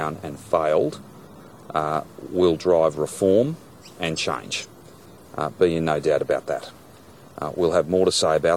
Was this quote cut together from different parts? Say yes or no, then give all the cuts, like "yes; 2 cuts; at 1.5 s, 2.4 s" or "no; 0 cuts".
no; 0 cuts